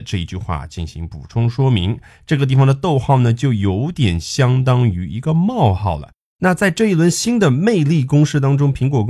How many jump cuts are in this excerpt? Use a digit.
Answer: 0